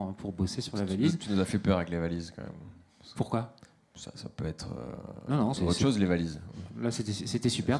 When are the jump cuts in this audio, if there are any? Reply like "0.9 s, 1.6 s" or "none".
5.6 s